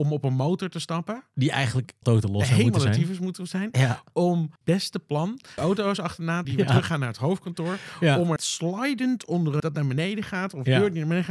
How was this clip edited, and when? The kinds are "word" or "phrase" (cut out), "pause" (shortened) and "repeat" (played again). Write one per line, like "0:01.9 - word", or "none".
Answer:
0:02.0 - word
0:04.6 - word
0:05.6 - word
0:06.4 - word
0:08.4 - word
0:09.6 - word